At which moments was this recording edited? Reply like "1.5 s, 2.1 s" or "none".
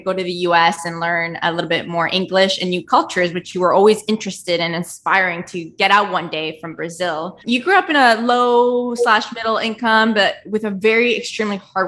7.4 s